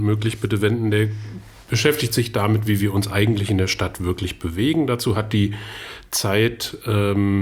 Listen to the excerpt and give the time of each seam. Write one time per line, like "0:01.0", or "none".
none